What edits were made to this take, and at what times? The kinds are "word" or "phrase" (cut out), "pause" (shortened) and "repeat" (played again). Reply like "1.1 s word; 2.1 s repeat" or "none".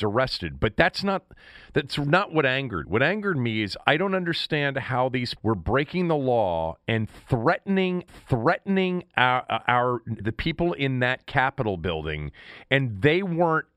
2.8 s word; 5.4 s word; 8.1 s repeat; 10.2 s word